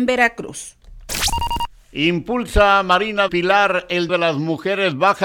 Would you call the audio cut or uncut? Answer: cut